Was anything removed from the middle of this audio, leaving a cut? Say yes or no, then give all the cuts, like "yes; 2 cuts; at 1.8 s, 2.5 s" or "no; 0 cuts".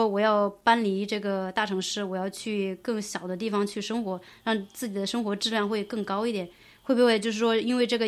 no; 0 cuts